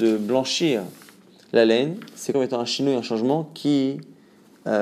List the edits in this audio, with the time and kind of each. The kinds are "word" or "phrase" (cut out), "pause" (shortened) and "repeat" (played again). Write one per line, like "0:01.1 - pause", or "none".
0:02.3 - word